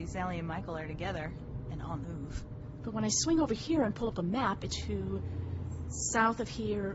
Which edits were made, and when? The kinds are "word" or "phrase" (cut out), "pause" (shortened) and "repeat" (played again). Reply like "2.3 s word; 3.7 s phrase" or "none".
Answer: 2.0 s word; 4.7 s phrase